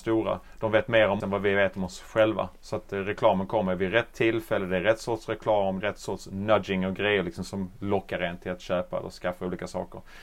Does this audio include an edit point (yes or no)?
yes